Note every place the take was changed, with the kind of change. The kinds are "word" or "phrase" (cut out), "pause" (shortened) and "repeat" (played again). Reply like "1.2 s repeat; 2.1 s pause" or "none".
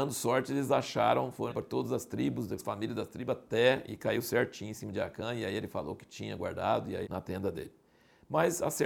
1.5 s word; 2.6 s word; 7.0 s word